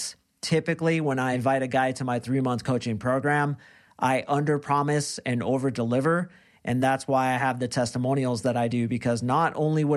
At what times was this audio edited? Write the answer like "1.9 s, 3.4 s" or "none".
none